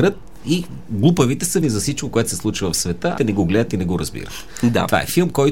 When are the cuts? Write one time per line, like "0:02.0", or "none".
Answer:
0:01.6
0:03.2